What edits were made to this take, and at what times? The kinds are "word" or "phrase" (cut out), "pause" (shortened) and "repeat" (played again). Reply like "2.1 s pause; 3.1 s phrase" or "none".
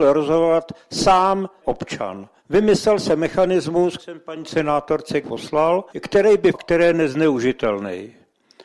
1.6 s word; 2.4 s pause; 4.0 s word; 5.2 s word; 5.9 s pause; 6.5 s word